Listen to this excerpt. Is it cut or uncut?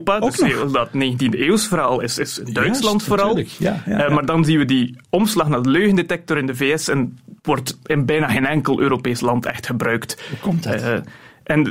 cut